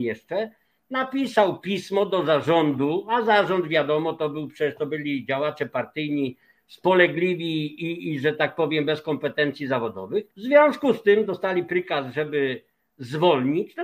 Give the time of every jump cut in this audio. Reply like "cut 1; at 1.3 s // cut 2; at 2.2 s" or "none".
cut 1; at 7.8 s // cut 2; at 10.3 s